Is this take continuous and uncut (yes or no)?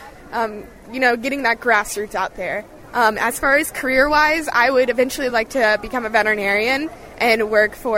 yes